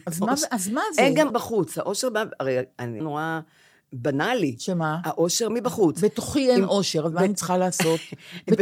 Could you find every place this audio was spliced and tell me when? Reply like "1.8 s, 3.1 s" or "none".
1.3 s, 3.0 s, 5.5 s